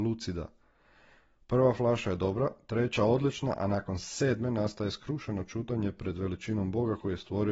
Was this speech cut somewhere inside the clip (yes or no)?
no